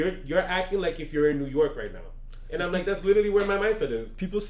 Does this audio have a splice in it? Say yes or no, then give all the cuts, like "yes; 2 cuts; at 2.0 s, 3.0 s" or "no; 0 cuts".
no; 0 cuts